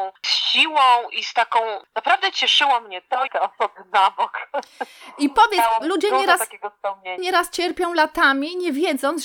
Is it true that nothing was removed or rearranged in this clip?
no; 4 cuts; at 1.9 s, 3.3 s, 5.8 s, 7.2 s

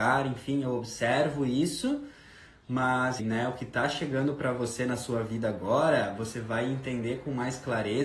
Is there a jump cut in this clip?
yes; 1 cut; at 3.2 s

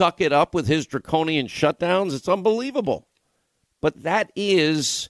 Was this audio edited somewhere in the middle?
yes; 1 cut; at 3.9 s

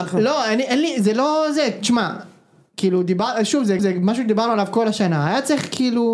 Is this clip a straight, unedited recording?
no; 1 cut; at 3.8 s

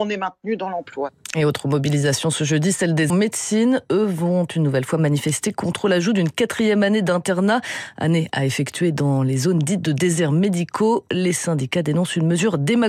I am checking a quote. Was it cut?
yes; 1 cut; at 3.1 s

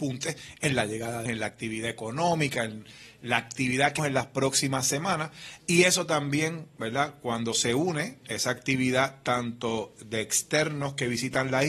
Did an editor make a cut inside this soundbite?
yes; 2 cuts; at 1.3 s, 4.0 s

